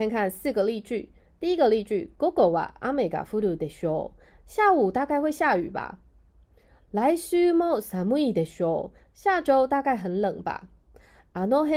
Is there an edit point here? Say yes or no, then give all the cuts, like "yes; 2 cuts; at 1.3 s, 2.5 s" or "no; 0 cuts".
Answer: no; 0 cuts